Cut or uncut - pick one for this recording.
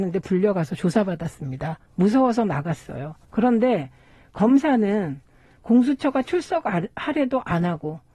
cut